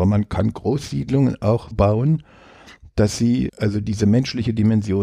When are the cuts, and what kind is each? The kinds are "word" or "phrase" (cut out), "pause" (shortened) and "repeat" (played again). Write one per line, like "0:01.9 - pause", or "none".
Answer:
0:01.7 - word
0:03.5 - word